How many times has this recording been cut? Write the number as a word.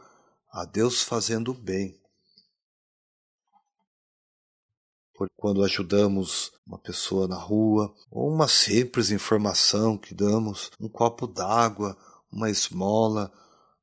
four